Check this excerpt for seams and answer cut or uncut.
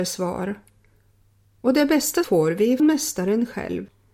cut